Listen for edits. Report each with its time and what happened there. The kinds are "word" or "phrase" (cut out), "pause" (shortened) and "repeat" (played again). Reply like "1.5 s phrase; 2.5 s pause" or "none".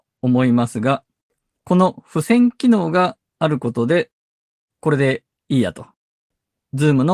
none